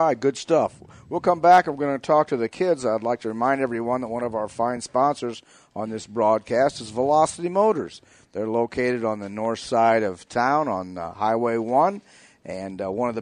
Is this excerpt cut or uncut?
uncut